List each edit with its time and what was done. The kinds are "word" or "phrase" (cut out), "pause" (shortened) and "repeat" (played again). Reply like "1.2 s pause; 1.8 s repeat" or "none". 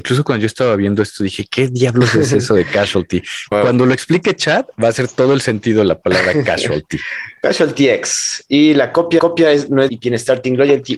3.5 s word; 4.7 s pause; 9.2 s repeat; 9.9 s word

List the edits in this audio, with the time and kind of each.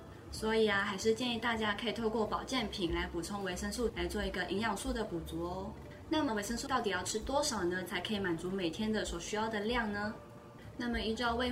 3.9 s word; 6.3 s word; 6.7 s word

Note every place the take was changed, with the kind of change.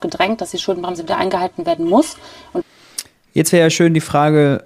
none

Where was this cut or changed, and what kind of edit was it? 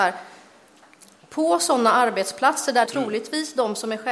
2.9 s phrase

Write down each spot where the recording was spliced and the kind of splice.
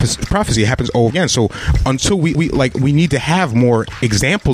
1.1 s phrase; 2.3 s repeat

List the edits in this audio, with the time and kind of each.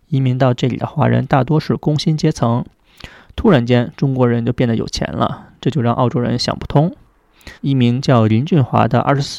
7.6 s pause

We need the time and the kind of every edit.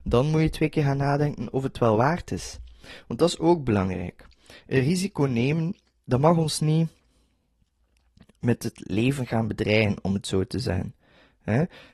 none

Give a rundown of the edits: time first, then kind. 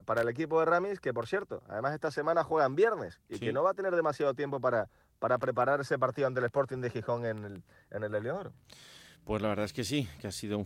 none

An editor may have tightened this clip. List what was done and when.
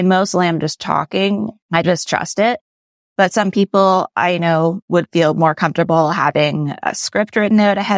1.8 s phrase

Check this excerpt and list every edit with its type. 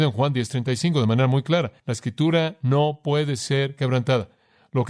1.8 s pause

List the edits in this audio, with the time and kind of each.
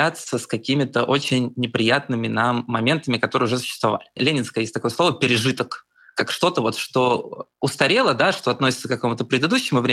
7.5 s pause

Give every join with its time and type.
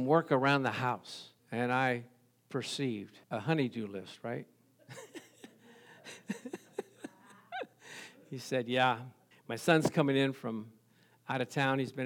1.4 s pause; 3.2 s pause; 9.3 s pause

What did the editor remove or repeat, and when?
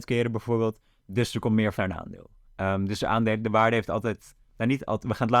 1.8 s word; 2.5 s pause

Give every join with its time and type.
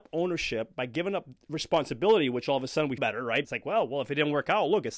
3.0 s word; 3.4 s word

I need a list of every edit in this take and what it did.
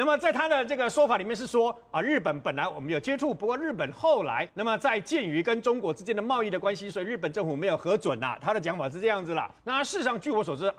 4.5 s pause; 9.6 s pause

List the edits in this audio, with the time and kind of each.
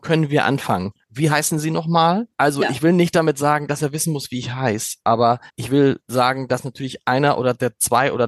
2.3 s pause; 5.5 s pause

